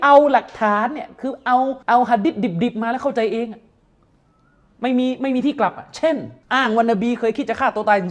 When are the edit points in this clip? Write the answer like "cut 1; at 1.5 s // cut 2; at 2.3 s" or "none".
cut 1; at 1.8 s // cut 2; at 6.4 s

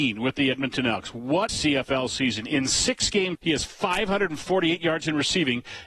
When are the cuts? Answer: cut 1; at 1.5 s // cut 2; at 3.3 s

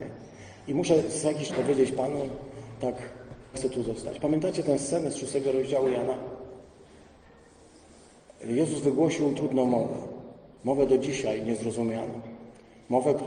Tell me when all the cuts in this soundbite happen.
cut 1; at 1.5 s // cut 2; at 3.5 s // cut 3; at 9.4 s

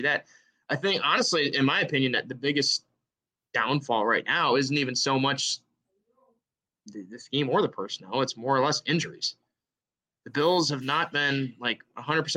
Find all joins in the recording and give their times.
none

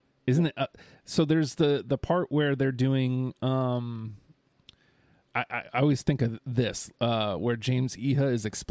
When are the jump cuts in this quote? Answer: none

